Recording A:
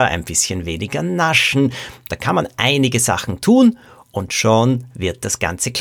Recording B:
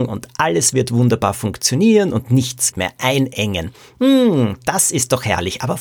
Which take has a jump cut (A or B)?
B